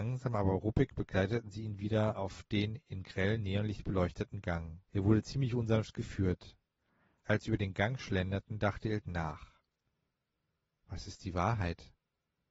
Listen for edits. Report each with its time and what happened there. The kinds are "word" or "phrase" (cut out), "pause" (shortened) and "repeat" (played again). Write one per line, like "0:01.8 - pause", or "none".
0:04.8 - pause